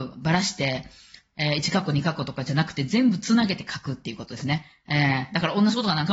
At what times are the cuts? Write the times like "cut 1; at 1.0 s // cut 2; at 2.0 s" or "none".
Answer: none